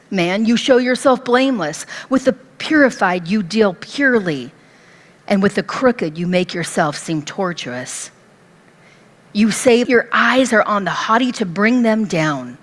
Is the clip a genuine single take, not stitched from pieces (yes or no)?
no